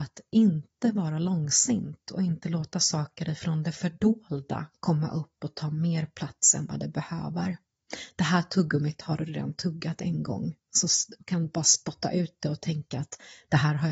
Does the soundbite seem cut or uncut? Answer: cut